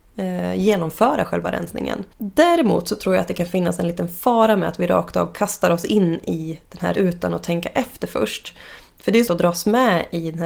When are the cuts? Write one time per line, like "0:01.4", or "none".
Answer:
0:02.1
0:06.9
0:09.3